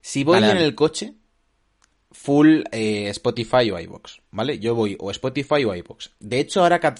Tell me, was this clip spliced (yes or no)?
no